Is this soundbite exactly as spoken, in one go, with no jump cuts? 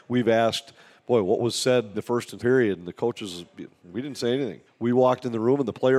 no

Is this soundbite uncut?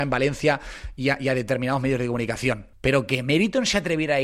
no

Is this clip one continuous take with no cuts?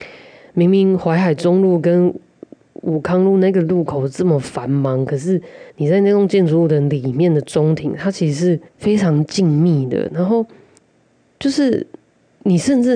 no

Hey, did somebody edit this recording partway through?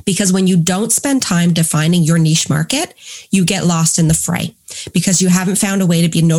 no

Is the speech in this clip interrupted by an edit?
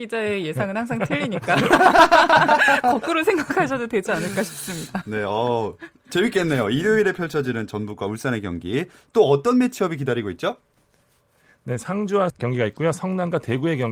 yes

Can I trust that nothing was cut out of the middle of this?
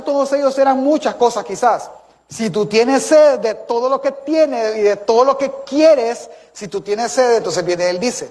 yes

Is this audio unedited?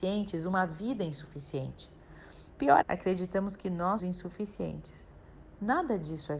no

